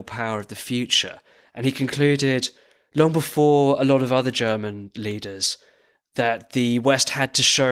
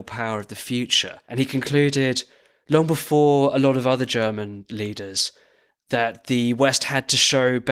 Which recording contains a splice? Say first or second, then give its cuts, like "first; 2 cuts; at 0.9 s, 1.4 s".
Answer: second; 1 cut; at 1.2 s